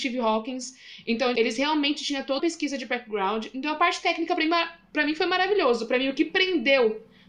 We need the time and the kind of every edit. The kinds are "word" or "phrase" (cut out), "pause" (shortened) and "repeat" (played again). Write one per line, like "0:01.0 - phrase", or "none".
0:01.4 - word
0:02.4 - word